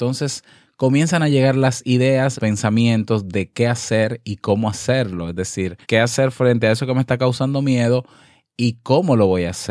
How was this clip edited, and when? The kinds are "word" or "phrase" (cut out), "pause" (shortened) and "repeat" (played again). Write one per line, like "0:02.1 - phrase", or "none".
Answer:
0:02.4 - word
0:05.8 - pause